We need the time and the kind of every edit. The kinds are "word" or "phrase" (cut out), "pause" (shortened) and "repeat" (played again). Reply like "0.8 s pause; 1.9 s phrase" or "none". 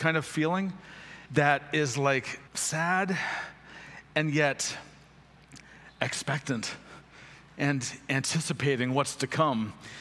1.3 s pause; 2.5 s pause

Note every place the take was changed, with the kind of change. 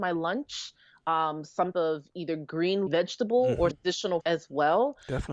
1.7 s word; 2.9 s word; 3.7 s word; 4.2 s word

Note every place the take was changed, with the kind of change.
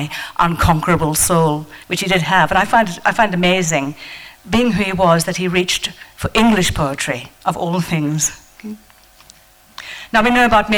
1.8 s pause

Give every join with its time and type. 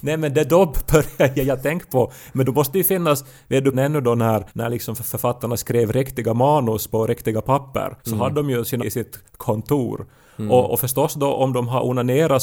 3.7 s phrase; 4.5 s pause; 8.0 s pause; 8.8 s phrase

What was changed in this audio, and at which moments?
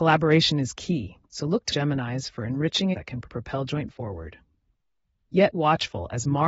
1.3 s pause; 1.7 s phrase; 2.9 s word; 3.9 s word; 5.5 s word

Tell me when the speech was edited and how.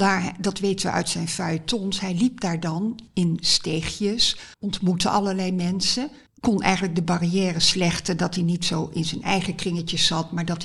3.1 s pause; 4.5 s pause; 6.3 s pause

